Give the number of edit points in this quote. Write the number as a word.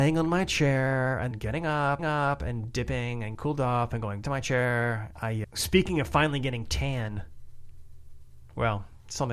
six